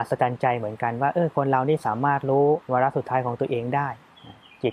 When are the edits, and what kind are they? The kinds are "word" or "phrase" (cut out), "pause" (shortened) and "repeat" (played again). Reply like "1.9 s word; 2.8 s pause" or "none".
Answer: 2.6 s pause